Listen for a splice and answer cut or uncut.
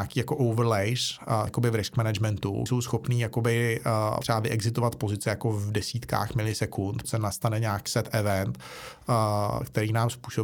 cut